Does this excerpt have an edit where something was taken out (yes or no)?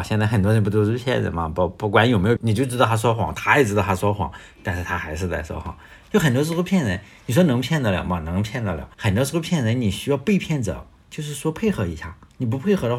yes